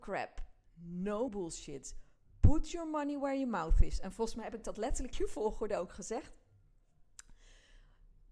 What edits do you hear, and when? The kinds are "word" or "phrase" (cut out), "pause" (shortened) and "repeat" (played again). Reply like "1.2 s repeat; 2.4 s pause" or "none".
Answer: 1.3 s word; 5.1 s word